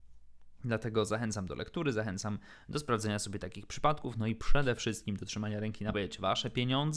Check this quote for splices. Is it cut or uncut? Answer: cut